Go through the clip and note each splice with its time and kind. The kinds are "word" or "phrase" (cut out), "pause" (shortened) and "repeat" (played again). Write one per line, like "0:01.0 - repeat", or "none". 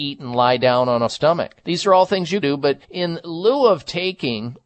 0:01.1 - word
0:01.6 - pause
0:02.4 - word
0:02.8 - pause